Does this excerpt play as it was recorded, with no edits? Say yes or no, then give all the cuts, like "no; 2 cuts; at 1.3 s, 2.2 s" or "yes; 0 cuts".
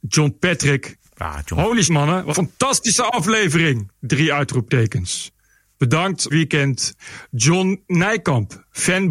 no; 5 cuts; at 1.1 s, 1.9 s, 2.3 s, 6.3 s, 7.9 s